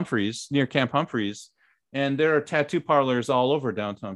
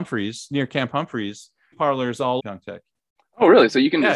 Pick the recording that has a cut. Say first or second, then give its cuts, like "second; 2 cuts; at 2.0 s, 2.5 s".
second; 2 cuts; at 1.7 s, 2.4 s